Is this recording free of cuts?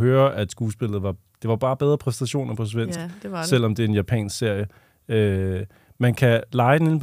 yes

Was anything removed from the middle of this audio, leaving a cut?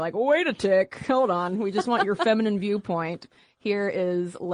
no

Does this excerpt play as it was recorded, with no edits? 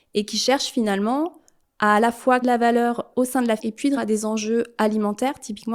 no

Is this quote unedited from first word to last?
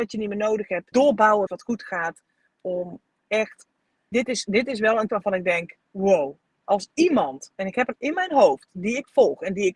no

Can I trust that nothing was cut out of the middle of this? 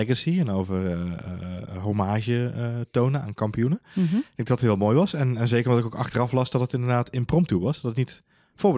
yes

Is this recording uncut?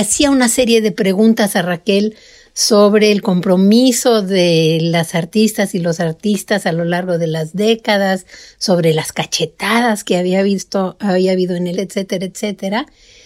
no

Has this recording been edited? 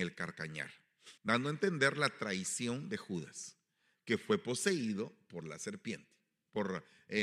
yes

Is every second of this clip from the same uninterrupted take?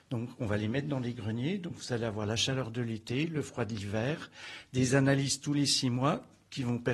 yes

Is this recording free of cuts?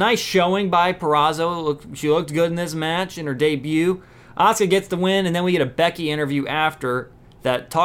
yes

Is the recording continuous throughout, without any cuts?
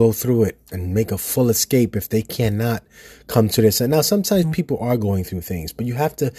yes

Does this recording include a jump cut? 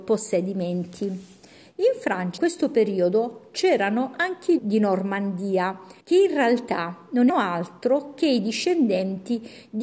yes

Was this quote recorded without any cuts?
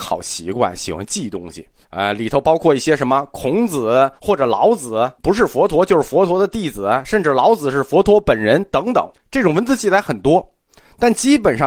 no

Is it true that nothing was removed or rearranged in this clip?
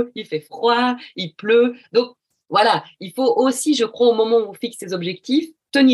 yes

